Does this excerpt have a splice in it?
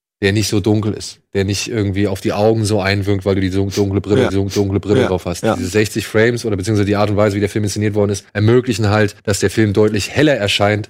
yes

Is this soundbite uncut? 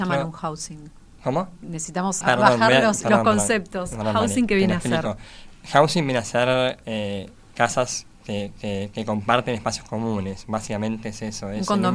no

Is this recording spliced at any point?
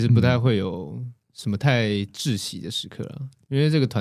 no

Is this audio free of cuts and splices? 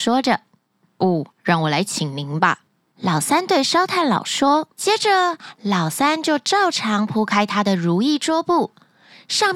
no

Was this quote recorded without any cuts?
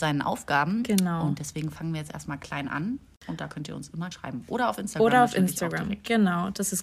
no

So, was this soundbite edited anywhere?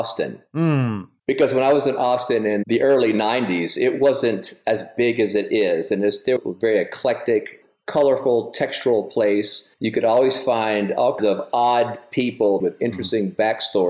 yes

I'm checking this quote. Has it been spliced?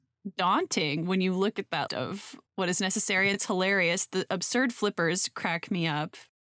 yes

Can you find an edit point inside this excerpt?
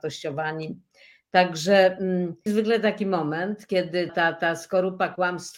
yes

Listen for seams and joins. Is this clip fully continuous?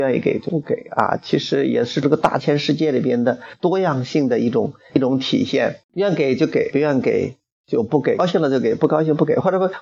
no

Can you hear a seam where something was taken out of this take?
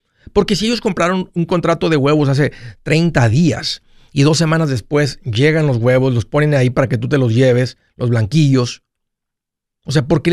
no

